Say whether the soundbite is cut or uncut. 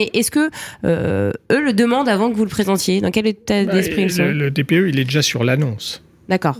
uncut